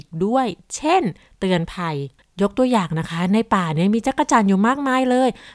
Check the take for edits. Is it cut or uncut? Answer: uncut